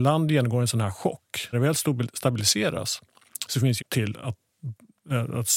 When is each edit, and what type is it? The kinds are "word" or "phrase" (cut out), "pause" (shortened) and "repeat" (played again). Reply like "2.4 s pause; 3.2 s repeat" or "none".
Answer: 1.5 s word; 3.8 s phrase